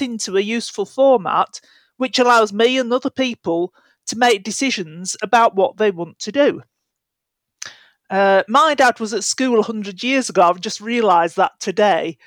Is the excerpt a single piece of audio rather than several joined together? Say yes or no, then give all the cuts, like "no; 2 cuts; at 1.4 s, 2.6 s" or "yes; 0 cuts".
yes; 0 cuts